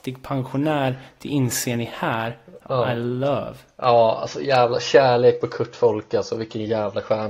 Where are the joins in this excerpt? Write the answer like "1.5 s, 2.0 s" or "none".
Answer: none